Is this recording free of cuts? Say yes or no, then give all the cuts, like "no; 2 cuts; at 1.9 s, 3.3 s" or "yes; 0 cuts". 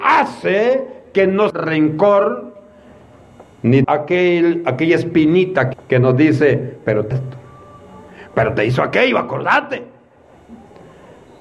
no; 4 cuts; at 1.5 s, 3.8 s, 5.7 s, 7.1 s